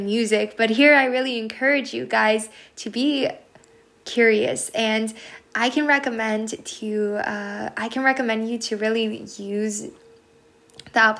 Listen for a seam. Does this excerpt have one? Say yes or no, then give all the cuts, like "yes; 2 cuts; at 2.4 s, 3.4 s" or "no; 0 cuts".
no; 0 cuts